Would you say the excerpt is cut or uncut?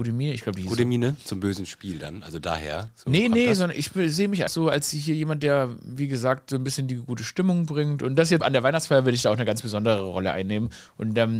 cut